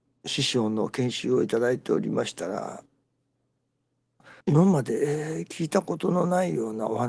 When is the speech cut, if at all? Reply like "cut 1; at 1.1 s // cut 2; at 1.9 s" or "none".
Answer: cut 1; at 4.4 s